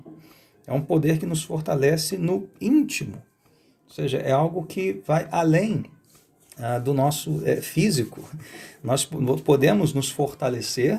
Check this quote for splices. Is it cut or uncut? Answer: uncut